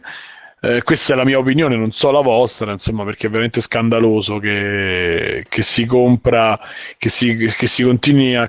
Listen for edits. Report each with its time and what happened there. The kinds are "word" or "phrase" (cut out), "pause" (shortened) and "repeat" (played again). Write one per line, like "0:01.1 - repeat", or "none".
none

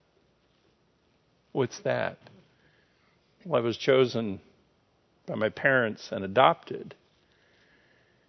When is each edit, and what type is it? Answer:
none

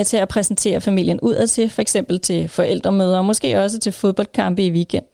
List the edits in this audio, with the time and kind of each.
none

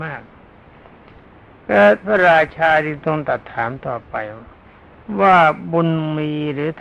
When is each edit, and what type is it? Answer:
none

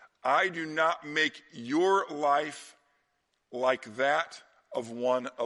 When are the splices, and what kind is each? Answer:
none

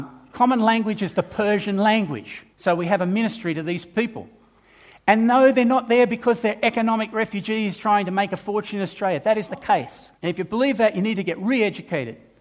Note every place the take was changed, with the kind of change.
0:02.5 - pause
0:07.8 - word
0:09.5 - word
0:10.1 - pause

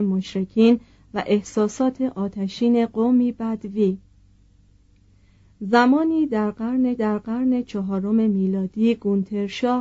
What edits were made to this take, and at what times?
0:07.0 - repeat

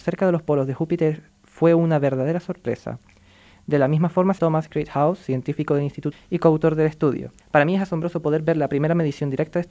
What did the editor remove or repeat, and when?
0:04.4 - word
0:06.1 - phrase
0:07.4 - pause

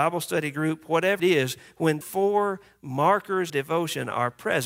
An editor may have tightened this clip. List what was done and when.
0:01.2 - word
0:02.0 - word
0:03.5 - word

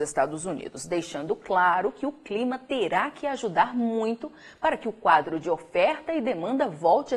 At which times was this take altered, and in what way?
none

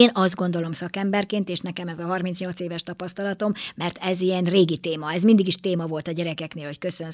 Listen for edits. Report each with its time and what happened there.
none

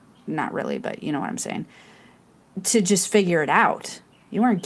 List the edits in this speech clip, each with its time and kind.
none

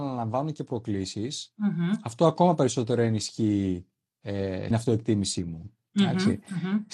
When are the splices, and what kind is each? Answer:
0:04.7 - word

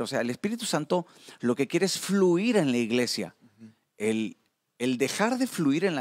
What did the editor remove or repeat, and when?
none

